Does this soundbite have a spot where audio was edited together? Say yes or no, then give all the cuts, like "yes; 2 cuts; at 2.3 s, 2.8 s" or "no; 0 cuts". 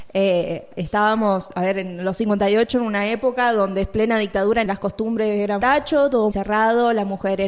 yes; 3 cuts; at 4.7 s, 5.6 s, 6.3 s